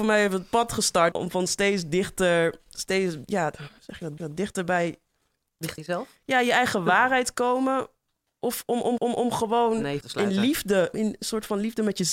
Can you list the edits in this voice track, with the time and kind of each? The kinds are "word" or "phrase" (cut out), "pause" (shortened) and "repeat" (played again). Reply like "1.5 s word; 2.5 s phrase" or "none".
1.1 s word; 4.2 s repeat; 5.8 s word; 9.0 s repeat; 10.0 s word; 10.9 s phrase